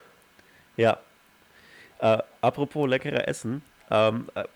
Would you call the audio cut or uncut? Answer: uncut